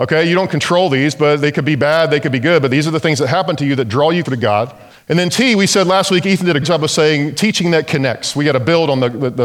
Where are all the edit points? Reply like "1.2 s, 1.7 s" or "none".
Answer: 4.3 s, 4.9 s, 6.6 s